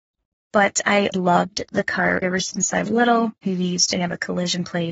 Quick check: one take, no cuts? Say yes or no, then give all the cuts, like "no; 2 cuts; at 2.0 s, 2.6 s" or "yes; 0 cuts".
no; 3 cuts; at 1.1 s, 2.2 s, 2.8 s